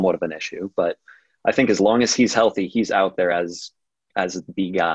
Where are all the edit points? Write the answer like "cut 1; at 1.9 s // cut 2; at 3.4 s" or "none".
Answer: none